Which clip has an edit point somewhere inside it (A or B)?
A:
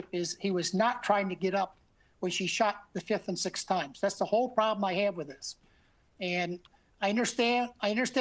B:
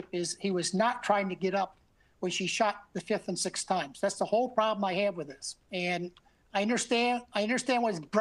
B